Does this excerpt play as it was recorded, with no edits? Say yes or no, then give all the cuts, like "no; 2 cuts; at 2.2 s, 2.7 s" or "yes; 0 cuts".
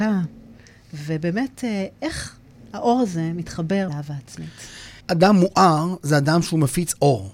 no; 2 cuts; at 3.9 s, 5.0 s